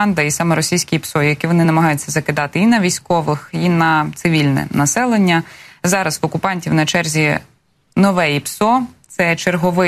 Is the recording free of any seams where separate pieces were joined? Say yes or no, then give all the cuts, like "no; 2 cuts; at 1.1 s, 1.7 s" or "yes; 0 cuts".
yes; 0 cuts